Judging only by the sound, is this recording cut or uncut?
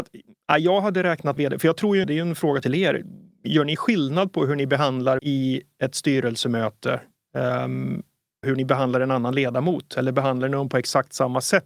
cut